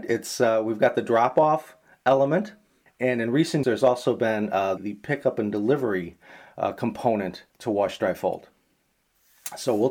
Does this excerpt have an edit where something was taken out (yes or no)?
yes